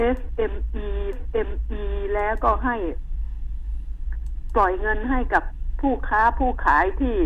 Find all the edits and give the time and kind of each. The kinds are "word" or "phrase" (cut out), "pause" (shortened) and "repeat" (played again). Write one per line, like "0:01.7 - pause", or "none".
0:01.1 - repeat